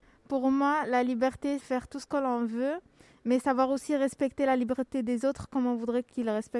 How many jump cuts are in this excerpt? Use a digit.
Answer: 1